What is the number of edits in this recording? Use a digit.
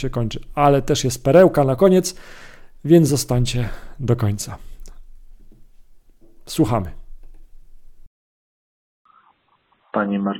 0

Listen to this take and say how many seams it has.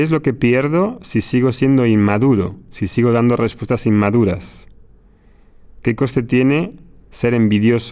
0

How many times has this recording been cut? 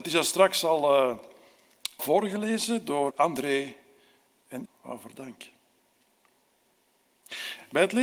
3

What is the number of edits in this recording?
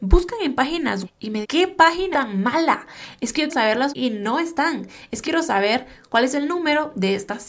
6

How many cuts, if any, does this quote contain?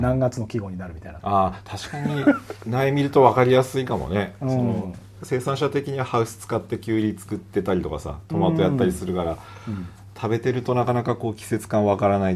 1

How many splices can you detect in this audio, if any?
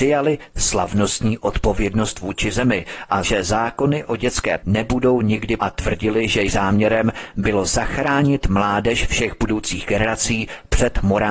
4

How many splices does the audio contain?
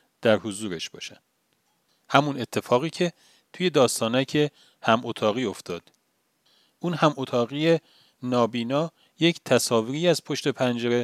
0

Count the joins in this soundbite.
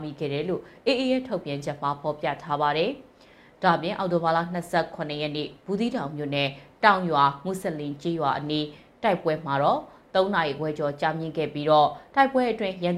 0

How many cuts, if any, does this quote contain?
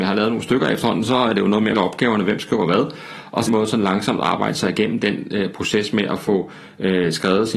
2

